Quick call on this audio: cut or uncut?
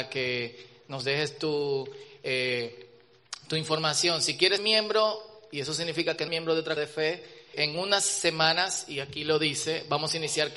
cut